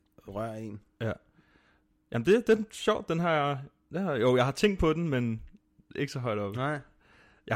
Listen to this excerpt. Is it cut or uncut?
uncut